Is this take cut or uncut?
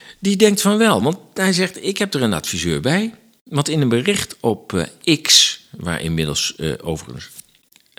uncut